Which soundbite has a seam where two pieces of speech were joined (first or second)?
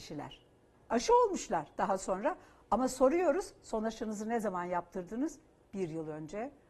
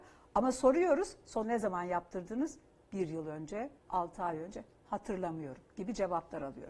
second